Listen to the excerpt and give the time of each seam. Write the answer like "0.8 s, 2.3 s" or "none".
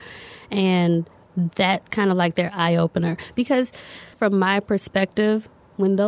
1.9 s, 4.1 s